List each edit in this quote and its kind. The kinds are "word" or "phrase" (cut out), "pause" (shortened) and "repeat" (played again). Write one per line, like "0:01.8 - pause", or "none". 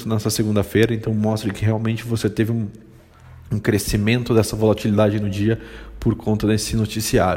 none